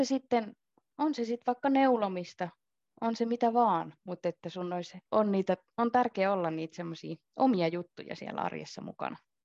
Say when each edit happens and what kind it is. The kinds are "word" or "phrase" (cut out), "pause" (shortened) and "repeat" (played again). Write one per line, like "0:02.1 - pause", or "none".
0:05.1 - pause